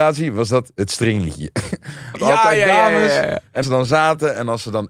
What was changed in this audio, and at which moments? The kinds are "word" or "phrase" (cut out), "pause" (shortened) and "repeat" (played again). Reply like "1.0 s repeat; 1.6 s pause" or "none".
2.1 s word; 3.6 s word